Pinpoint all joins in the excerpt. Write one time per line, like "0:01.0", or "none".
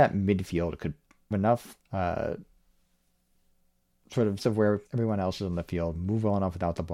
0:01.3
0:01.9
0:04.4
0:04.9